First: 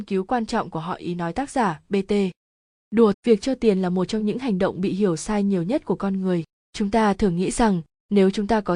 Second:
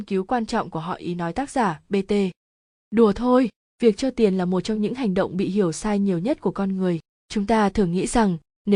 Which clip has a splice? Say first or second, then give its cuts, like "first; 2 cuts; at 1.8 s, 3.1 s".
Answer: first; 1 cut; at 3.1 s